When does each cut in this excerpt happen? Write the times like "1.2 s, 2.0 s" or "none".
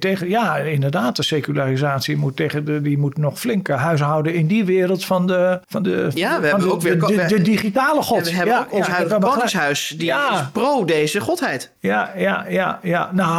5.6 s, 11.8 s